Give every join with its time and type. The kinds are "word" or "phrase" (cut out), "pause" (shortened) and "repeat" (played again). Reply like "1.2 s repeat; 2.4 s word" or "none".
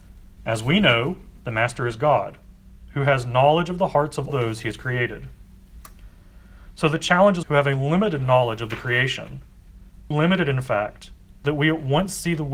4.3 s word; 7.4 s phrase; 10.1 s word